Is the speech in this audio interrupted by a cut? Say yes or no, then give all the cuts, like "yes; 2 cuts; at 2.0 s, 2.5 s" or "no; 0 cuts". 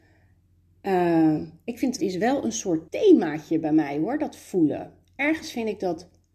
yes; 2 cuts; at 2.0 s, 2.9 s